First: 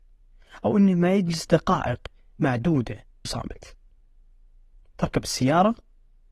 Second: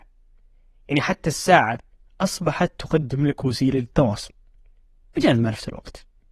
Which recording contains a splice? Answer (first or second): first